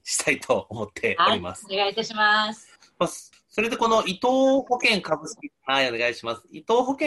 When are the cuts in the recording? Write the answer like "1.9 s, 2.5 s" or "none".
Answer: none